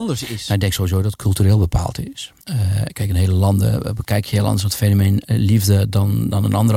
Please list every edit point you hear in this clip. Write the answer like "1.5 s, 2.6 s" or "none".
2.4 s